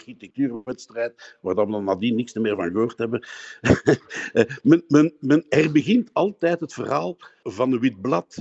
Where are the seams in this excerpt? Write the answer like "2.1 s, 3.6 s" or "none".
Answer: none